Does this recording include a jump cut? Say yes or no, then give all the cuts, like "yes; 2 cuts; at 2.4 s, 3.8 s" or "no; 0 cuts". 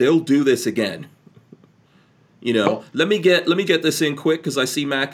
yes; 1 cut; at 3.7 s